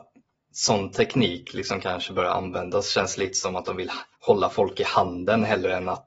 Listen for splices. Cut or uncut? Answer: cut